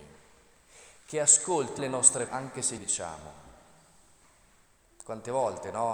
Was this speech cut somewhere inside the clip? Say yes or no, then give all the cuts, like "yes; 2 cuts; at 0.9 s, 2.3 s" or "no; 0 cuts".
yes; 3 cuts; at 1.8 s, 2.3 s, 2.8 s